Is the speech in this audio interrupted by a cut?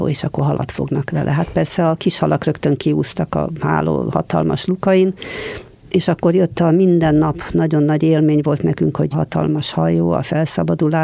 yes; 1 cut; at 9.1 s

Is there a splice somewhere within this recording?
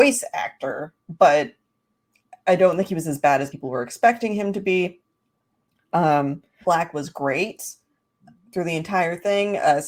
yes; 2 cuts; at 3.5 s, 6.6 s

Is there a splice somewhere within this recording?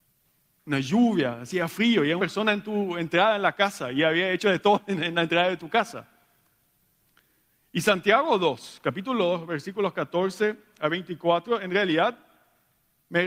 yes; 1 cut; at 2.2 s

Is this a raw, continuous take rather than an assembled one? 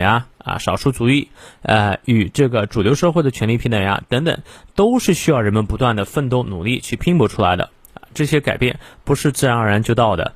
yes; 0 cuts

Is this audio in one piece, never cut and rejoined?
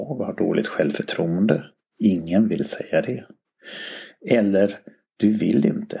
yes; 0 cuts

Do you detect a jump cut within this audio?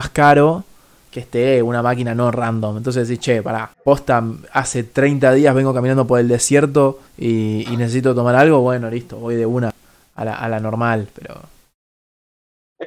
yes; 2 cuts; at 3.7 s, 7.1 s

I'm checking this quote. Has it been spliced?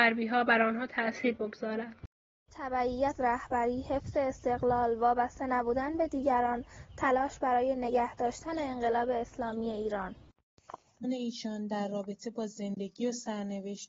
yes; 2 cuts; at 3.2 s, 11.0 s

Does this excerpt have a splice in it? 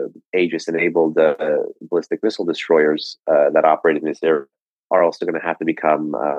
no; 0 cuts

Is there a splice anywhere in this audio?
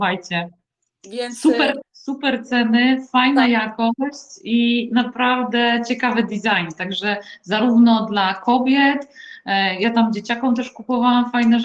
yes; 1 cut; at 1.8 s

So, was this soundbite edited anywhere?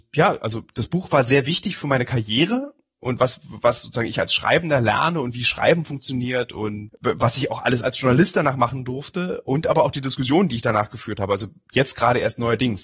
no; 0 cuts

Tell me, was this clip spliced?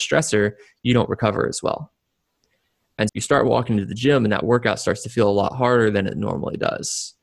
yes; 1 cut; at 3.1 s

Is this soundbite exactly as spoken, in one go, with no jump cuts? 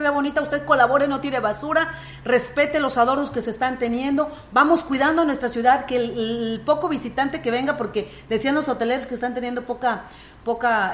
yes; 0 cuts

